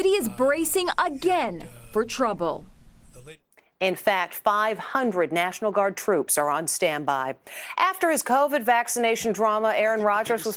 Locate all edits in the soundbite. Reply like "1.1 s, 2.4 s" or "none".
none